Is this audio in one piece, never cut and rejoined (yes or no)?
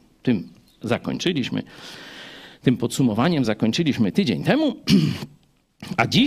yes